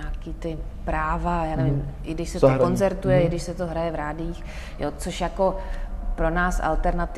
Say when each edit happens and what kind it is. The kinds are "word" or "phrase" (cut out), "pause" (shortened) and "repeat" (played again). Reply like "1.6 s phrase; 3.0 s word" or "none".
none